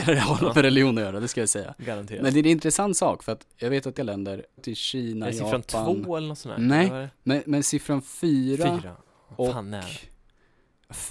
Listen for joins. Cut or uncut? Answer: cut